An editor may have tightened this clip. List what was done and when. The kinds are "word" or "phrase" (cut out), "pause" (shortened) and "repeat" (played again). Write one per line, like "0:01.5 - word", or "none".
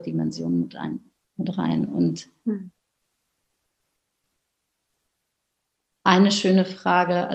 none